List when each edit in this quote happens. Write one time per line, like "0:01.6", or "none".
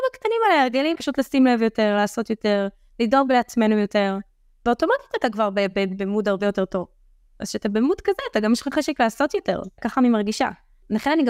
0:00.9